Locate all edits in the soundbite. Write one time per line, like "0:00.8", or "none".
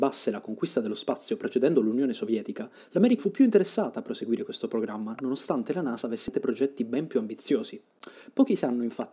0:03.2